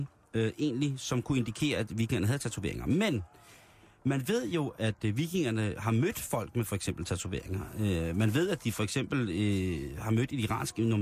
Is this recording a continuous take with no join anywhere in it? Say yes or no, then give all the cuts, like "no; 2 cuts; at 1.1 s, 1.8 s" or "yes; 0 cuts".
yes; 0 cuts